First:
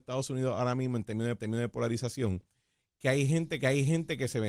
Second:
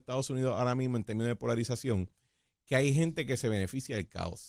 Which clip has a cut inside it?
first; 2 cuts; at 1.4 s, 3.6 s

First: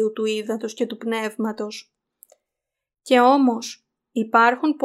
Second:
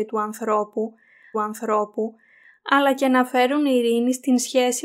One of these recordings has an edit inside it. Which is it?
second; 1 cut; at 1.3 s

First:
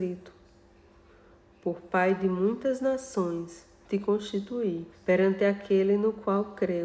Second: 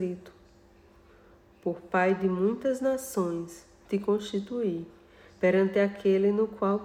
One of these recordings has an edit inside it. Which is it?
first; 1 cut; at 4.9 s

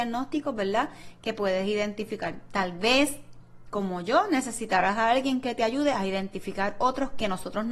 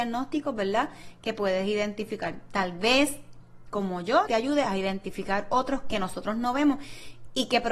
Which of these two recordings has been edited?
second; 1 cut; at 4.3 s

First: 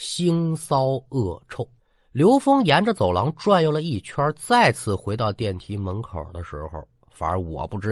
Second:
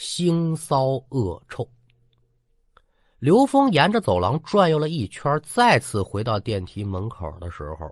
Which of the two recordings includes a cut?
first; 1 cut; at 1.8 s

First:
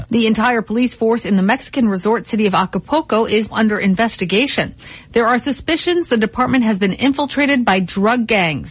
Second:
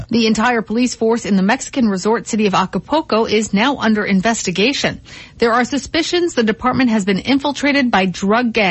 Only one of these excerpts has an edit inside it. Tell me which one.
first; 1 cut; at 3.5 s

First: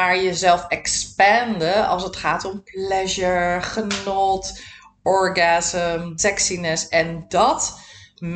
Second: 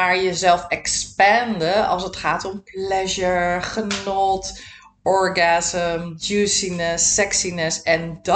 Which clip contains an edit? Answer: first; 1 cut; at 6.2 s

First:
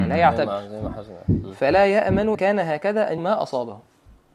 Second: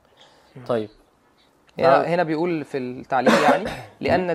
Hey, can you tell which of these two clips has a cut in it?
first; 2 cuts; at 2.3 s, 3.2 s

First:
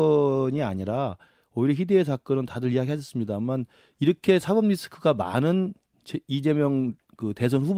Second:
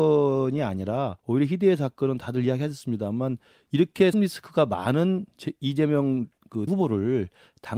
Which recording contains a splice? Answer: second; 4 cuts; at 1.2 s, 4.1 s, 5.3 s, 6.7 s

